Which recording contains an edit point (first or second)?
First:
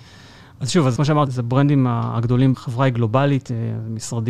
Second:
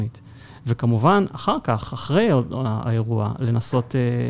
first